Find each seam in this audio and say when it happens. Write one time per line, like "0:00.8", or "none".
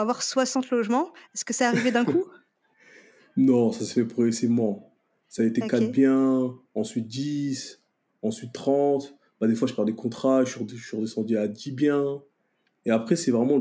none